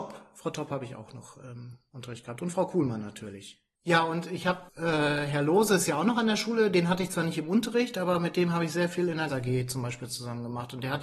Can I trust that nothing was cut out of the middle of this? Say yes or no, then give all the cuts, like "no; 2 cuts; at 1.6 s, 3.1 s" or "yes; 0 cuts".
no; 2 cuts; at 4.7 s, 9.3 s